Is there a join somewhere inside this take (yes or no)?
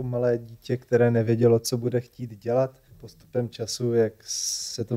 yes